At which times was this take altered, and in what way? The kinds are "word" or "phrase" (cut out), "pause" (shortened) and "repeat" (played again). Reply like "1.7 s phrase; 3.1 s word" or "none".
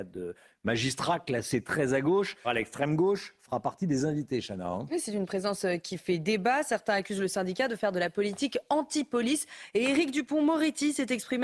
2.4 s word

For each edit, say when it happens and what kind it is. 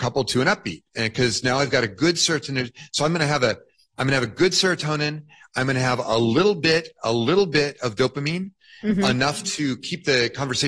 none

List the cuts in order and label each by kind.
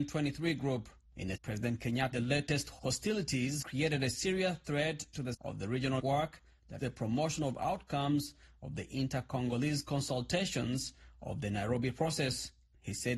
1.4 s word; 2.1 s word; 3.6 s word; 5.3 s word; 6.0 s word; 6.8 s word

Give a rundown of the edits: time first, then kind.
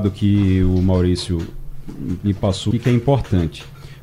2.7 s word

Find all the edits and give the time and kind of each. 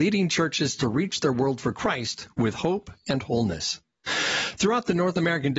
none

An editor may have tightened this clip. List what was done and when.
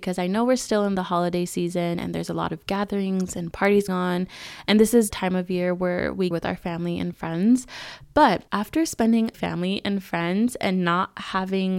3.9 s word; 5.1 s phrase; 6.3 s phrase; 8.5 s pause; 9.3 s phrase

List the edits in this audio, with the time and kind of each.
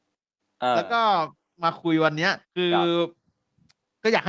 2.4 s pause

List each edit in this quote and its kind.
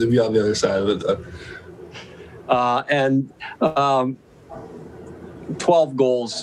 1.0 s word

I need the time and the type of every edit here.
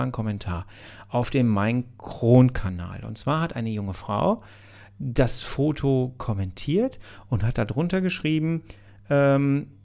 none

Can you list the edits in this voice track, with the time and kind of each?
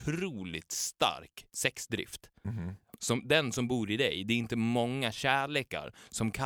none

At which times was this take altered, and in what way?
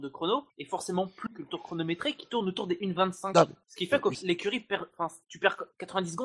1.3 s word; 4.1 s word

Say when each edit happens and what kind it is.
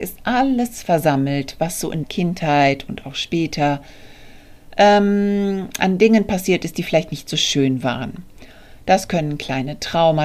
2.0 s phrase

